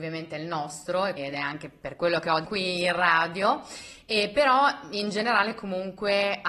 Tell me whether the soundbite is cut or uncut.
cut